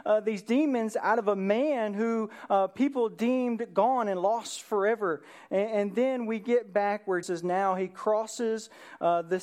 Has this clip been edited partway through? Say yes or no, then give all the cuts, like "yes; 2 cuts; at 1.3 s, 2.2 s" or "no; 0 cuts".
yes; 1 cut; at 7.2 s